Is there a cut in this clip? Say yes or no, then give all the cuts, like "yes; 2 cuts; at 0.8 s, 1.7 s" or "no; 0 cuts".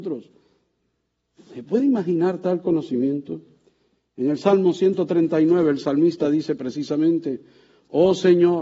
no; 0 cuts